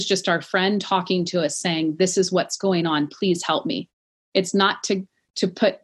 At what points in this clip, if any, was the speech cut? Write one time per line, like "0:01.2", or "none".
none